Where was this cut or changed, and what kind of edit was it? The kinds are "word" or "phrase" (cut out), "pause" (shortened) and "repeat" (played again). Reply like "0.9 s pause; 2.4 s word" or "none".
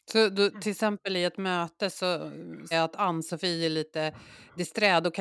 2.7 s word